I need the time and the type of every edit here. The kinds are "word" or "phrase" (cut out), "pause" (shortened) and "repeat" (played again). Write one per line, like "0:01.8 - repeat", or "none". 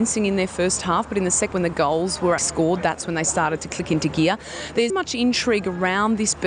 0:01.5 - word
0:02.4 - word
0:04.9 - word